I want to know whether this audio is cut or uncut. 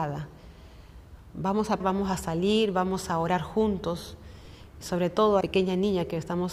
cut